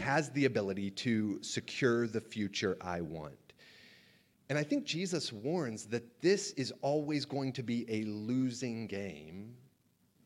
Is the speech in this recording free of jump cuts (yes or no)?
yes